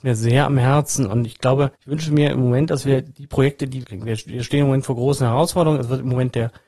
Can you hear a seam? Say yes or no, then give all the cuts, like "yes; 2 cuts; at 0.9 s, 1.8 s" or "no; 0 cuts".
yes; 2 cuts; at 1.8 s, 3.8 s